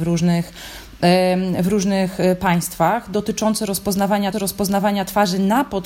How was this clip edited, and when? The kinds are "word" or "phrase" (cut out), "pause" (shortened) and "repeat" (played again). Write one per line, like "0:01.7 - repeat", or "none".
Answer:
0:04.3 - repeat